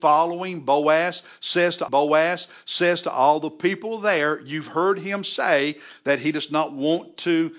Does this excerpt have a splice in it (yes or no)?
yes